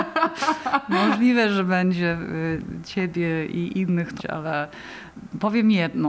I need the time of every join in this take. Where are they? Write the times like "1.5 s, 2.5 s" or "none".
4.2 s